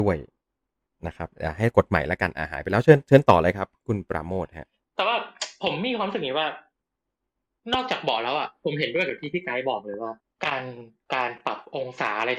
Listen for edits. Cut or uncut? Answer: cut